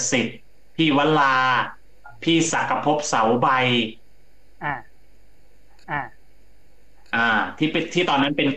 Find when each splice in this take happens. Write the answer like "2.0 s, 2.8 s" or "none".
5.8 s

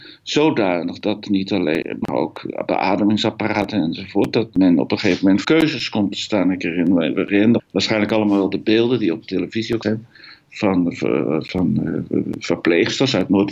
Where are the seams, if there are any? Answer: 2.0 s, 5.4 s, 7.6 s, 9.8 s

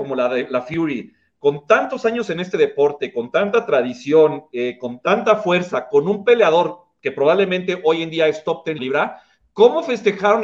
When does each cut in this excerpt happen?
8.8 s

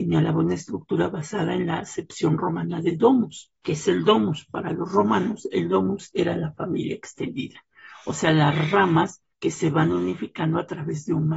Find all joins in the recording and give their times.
3.6 s, 9.3 s

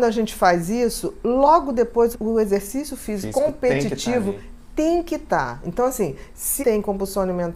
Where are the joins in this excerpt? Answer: 2.1 s, 6.6 s

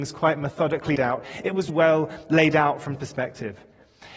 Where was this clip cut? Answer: 1.0 s, 1.7 s, 3.0 s

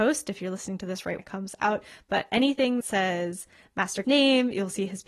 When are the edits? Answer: 1.2 s, 2.8 s, 4.0 s

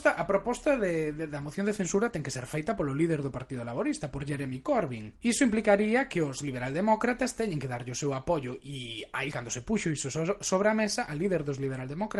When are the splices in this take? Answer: 5.2 s, 9.3 s

